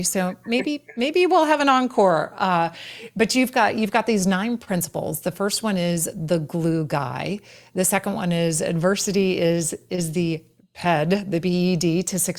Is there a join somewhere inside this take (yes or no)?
no